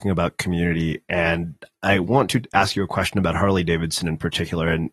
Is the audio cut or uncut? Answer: uncut